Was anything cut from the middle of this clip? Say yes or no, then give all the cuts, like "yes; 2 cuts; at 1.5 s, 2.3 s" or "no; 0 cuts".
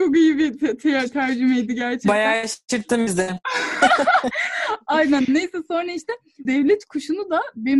yes; 1 cut; at 6.4 s